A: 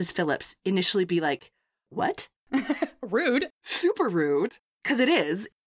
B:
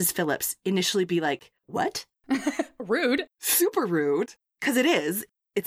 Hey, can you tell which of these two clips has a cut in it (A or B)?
B